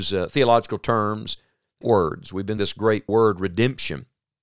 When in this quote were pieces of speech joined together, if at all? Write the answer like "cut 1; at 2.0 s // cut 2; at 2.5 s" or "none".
cut 1; at 1.8 s // cut 2; at 2.6 s // cut 3; at 3.1 s